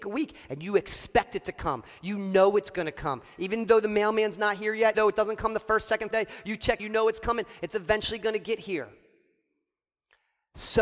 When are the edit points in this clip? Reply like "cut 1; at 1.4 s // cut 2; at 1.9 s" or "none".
cut 1; at 4.9 s // cut 2; at 6.1 s // cut 3; at 6.8 s